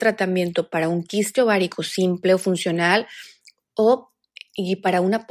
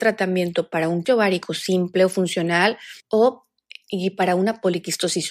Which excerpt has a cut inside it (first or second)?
second